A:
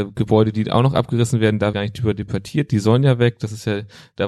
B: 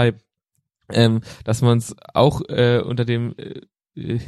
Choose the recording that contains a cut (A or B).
A